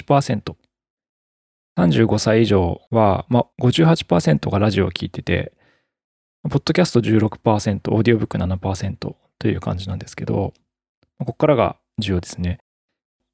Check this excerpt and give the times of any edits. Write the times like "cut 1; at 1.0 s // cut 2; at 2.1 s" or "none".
cut 1; at 3.5 s